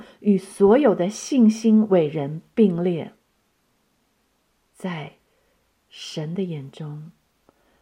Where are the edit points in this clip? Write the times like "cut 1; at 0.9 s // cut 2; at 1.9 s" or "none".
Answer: none

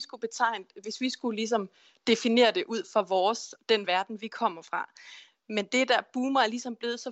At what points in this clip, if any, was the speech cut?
none

